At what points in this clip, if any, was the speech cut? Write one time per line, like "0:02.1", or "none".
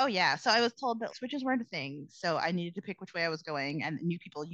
0:01.1